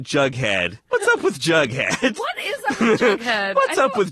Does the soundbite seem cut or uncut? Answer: uncut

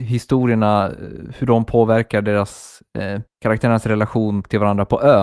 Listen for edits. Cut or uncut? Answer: cut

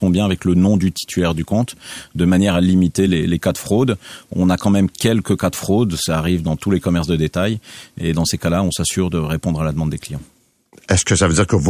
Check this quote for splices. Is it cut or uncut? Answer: uncut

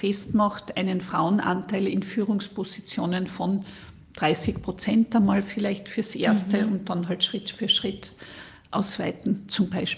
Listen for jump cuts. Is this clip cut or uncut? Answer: uncut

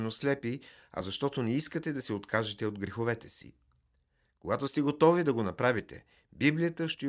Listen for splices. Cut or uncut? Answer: uncut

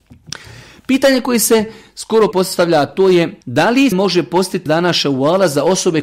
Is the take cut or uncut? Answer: cut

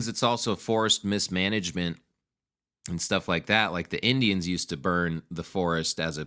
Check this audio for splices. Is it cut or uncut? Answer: uncut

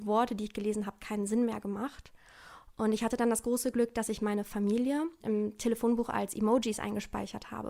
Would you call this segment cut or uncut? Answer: uncut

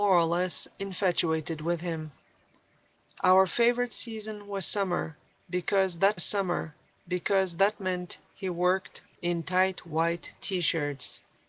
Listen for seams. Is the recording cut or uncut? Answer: cut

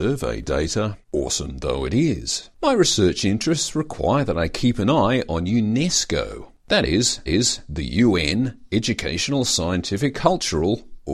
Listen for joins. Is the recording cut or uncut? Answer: cut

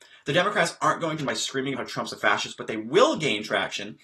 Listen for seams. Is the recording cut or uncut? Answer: cut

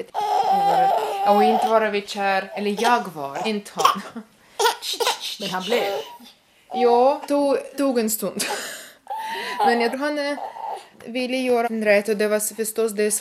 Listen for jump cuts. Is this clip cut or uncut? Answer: cut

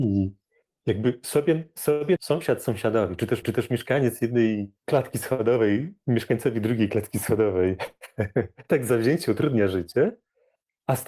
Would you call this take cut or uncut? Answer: cut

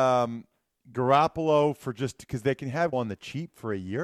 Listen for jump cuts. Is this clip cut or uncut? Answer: cut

